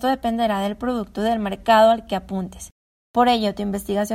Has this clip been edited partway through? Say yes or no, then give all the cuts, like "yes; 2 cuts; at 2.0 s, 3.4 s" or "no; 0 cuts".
no; 0 cuts